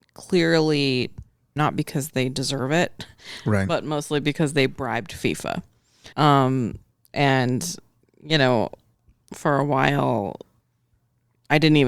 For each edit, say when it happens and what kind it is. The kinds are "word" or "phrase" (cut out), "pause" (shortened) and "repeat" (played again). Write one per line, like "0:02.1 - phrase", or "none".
0:01.6 - word
0:06.1 - pause